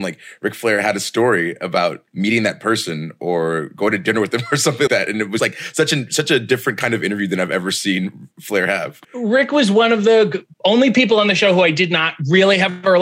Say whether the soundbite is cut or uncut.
cut